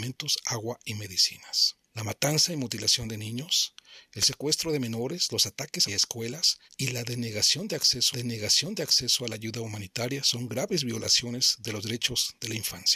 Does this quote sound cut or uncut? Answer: cut